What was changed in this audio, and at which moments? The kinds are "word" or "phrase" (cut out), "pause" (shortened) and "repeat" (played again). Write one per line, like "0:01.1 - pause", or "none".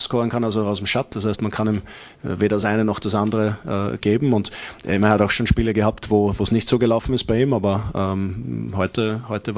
none